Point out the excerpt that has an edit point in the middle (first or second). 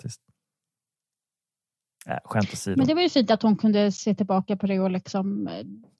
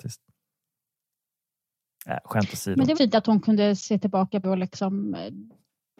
second